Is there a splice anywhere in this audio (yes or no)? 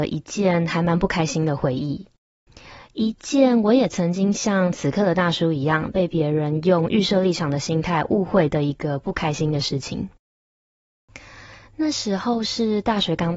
no